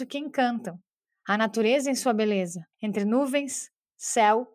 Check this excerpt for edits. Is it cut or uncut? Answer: cut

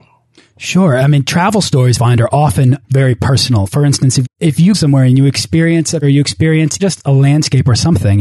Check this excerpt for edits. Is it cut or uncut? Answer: cut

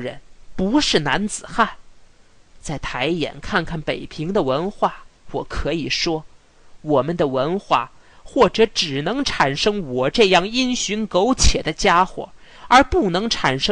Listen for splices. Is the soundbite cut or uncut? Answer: cut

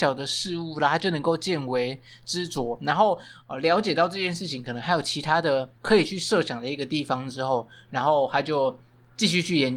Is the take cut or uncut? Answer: cut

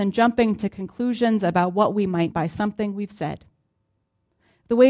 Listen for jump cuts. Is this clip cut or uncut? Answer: cut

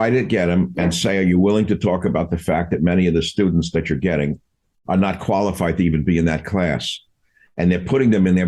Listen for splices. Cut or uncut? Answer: uncut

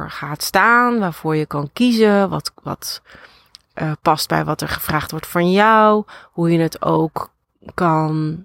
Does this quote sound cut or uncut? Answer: uncut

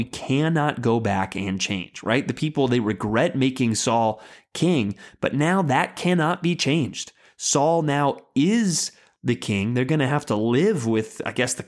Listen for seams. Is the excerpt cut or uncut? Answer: uncut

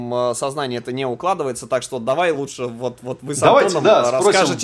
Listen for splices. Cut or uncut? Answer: uncut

